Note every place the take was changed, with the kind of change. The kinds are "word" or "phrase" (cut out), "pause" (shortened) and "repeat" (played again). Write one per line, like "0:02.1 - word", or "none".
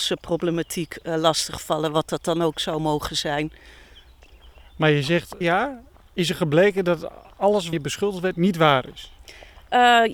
0:05.4 - phrase
0:07.7 - word